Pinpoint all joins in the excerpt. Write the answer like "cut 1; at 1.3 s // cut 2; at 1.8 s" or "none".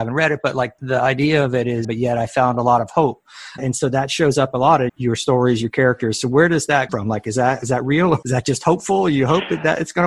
cut 1; at 1.8 s // cut 2; at 3.6 s // cut 3; at 4.9 s // cut 4; at 6.9 s // cut 5; at 8.2 s